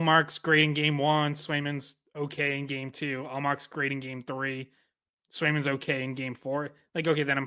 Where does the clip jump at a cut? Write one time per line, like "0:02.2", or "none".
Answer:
none